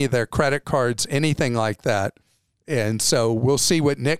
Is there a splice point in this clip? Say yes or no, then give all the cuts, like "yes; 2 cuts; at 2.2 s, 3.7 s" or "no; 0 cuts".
no; 0 cuts